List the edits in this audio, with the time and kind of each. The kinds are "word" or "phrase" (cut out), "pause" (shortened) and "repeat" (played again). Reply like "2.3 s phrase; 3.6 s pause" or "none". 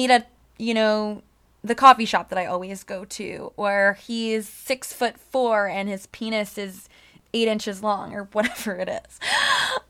none

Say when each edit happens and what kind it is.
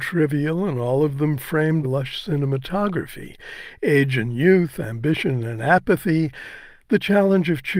1.8 s word

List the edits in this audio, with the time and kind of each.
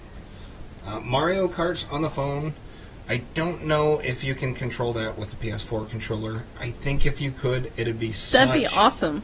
none

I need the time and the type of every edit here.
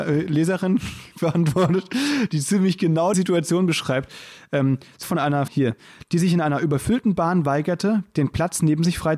1.1 s pause; 3.1 s word; 5.0 s word; 5.5 s word

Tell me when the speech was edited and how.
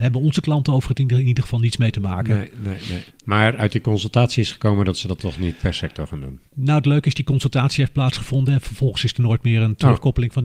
3.1 s pause; 6.5 s pause

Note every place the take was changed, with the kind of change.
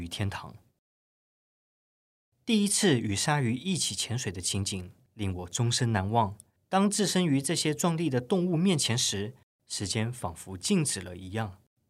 none

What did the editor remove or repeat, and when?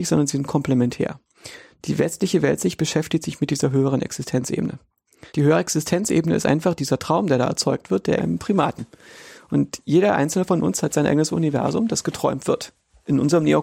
5.3 s pause; 8.2 s phrase

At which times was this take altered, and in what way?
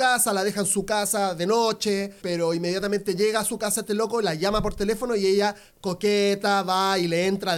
2.2 s word

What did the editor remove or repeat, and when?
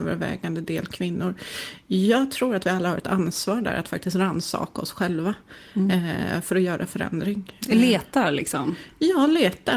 none

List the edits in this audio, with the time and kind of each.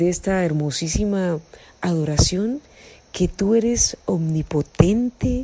none

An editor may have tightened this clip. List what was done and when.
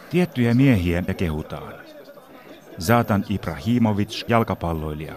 1.1 s word; 4.3 s phrase

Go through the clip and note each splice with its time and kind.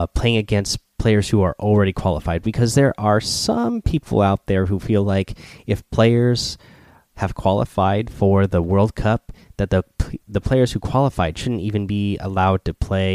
none

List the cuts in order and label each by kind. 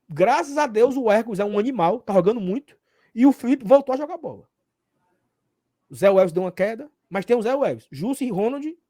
none

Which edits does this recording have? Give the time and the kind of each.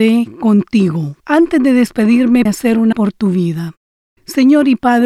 1.2 s pause; 2.5 s word; 2.9 s word

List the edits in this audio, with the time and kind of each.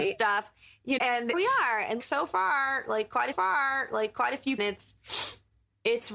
1.0 s word; 1.3 s word; 2.0 s word; 3.3 s repeat; 4.6 s phrase

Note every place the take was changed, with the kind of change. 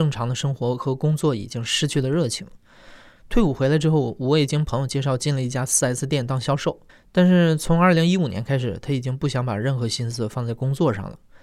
6.9 s pause

